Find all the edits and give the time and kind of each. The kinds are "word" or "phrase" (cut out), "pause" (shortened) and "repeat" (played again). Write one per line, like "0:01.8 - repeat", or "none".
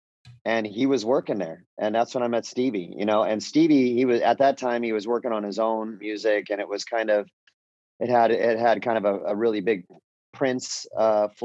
none